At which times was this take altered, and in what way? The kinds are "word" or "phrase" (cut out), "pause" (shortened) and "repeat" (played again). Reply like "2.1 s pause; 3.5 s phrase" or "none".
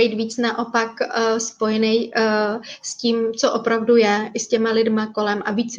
none